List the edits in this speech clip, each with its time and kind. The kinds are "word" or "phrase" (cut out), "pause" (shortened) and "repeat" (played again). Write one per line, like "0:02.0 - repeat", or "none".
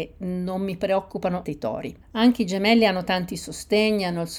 0:01.4 - word
0:02.0 - pause

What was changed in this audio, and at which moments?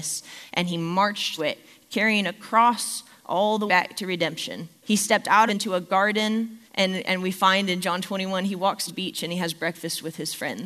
0:01.4 - word
0:03.7 - word
0:04.8 - pause
0:05.5 - phrase
0:06.7 - pause
0:08.9 - word

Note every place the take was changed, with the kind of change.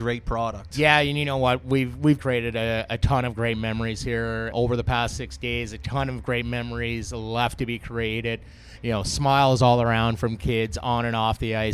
0:02.2 - word
0:04.5 - word

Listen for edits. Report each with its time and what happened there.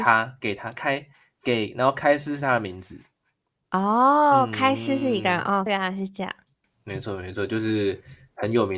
0:05.7 - phrase

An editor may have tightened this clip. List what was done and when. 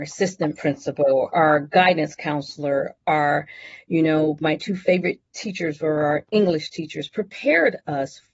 none

